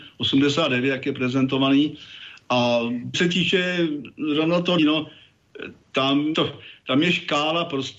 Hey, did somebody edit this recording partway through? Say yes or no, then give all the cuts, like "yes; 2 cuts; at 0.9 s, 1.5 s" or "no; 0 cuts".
yes; 3 cuts; at 3.1 s, 4.8 s, 6.3 s